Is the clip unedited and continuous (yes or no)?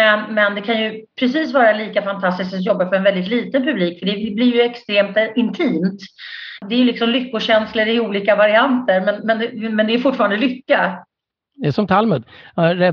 yes